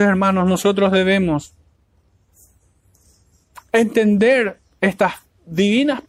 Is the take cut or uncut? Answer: uncut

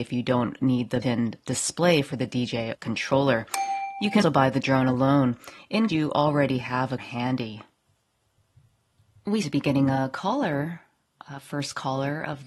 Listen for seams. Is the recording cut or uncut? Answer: cut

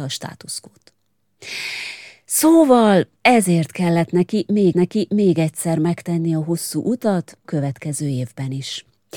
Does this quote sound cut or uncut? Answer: cut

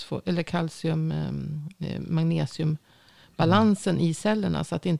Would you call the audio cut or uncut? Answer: uncut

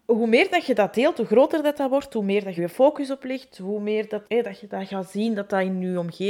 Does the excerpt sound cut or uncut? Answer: cut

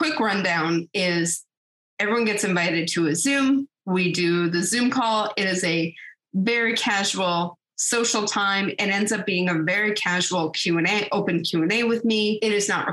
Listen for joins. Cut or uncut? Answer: uncut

